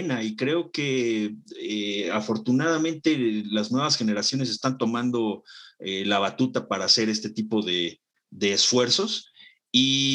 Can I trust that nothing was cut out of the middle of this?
yes; 0 cuts

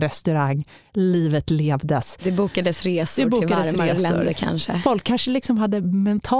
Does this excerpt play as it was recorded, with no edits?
yes; 0 cuts

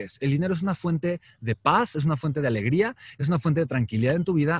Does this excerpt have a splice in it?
no; 0 cuts

